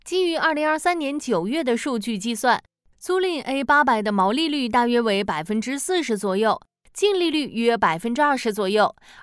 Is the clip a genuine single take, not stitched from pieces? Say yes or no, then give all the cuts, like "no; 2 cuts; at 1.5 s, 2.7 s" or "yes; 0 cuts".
yes; 0 cuts